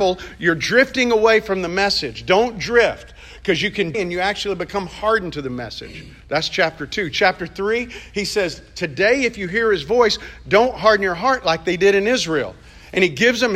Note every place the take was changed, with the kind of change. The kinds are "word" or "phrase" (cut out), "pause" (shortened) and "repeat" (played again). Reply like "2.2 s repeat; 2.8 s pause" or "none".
3.9 s phrase; 6.2 s pause